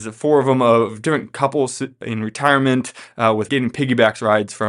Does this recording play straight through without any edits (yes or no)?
no